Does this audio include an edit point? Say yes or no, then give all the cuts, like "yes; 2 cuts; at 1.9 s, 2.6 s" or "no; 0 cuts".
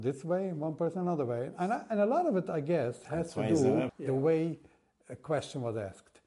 yes; 1 cut; at 3.9 s